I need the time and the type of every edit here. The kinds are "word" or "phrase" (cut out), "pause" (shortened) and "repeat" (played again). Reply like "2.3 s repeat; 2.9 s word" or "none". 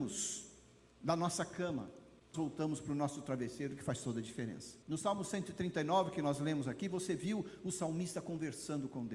2.3 s phrase; 4.8 s pause